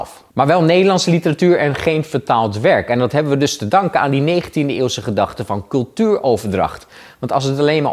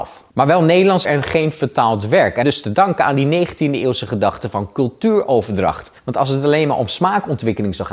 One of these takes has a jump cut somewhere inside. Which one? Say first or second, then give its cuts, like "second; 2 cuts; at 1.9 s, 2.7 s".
second; 3 cuts; at 1.1 s, 2.4 s, 6.0 s